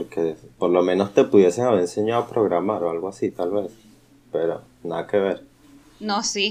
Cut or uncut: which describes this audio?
uncut